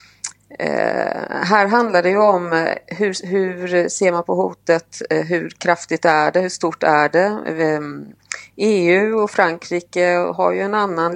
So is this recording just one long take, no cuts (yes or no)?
yes